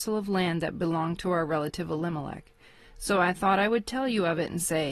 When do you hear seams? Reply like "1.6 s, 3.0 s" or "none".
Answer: none